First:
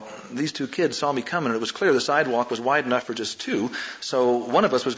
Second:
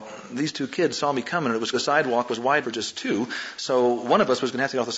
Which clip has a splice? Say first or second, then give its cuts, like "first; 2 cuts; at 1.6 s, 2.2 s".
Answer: second; 2 cuts; at 1.7 s, 2.6 s